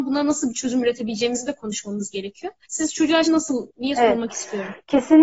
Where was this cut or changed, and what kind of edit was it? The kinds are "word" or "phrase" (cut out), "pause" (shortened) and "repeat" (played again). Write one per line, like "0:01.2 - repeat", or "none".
0:02.6 - pause
0:03.2 - word
0:03.7 - word

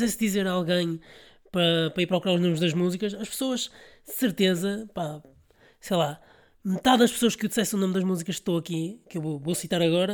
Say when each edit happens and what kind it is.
none

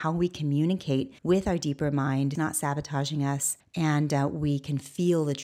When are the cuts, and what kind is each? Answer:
0:01.2 - pause
0:02.4 - phrase
0:03.6 - pause

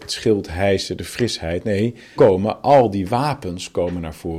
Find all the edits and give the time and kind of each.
0:02.1 - word

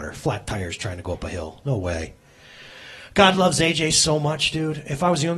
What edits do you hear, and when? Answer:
none

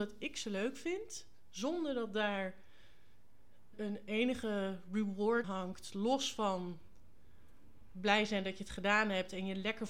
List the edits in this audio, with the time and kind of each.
0:03.7 - word
0:05.4 - word

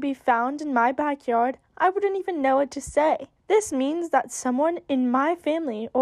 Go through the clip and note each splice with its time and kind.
0:03.4 - pause

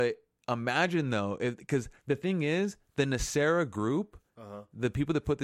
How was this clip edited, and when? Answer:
0:02.0 - pause

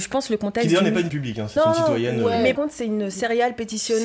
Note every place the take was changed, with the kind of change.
0:01.1 - word
0:01.6 - word
0:02.6 - word

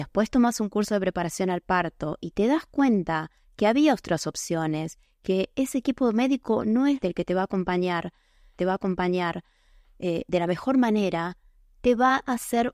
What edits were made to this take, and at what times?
0:07.0 - word
0:08.6 - repeat

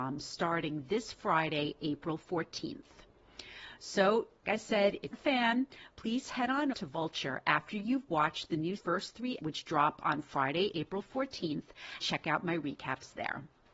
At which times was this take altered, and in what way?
0:04.4 - word
0:05.1 - word
0:06.7 - word
0:08.8 - word
0:09.4 - word
0:12.0 - word

